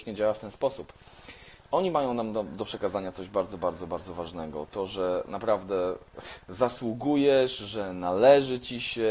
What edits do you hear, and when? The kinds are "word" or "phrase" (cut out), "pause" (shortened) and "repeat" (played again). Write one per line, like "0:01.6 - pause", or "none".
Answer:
0:06.4 - pause